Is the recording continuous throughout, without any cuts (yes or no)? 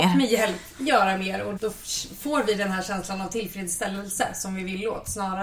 no